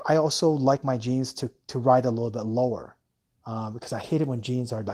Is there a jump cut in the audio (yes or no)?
no